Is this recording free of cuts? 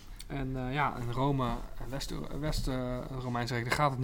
yes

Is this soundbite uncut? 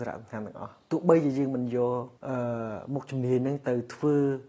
no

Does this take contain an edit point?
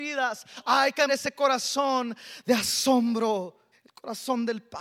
yes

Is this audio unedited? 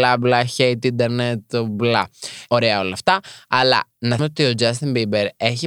no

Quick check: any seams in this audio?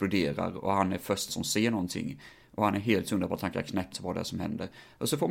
yes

